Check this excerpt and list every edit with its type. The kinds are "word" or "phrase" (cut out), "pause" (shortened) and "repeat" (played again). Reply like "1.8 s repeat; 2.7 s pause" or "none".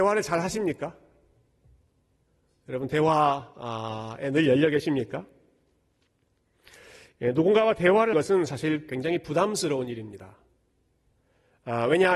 8.1 s word